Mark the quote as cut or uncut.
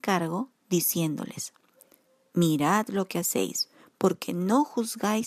uncut